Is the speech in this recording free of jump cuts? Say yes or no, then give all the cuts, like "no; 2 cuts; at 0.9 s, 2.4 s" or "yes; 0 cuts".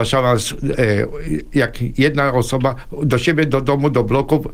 yes; 0 cuts